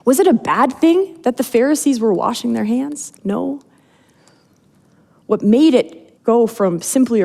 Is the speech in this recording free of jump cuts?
no; 2 cuts; at 3.2 s, 6.2 s

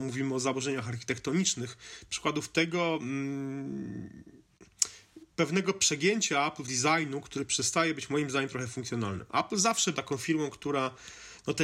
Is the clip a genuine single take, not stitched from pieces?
no; 3 cuts; at 5.3 s, 6.6 s, 9.9 s

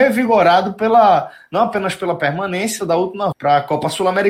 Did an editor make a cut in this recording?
yes; 2 cuts; at 2.8 s, 3.3 s

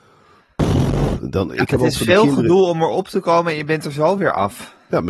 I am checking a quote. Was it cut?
no; 0 cuts

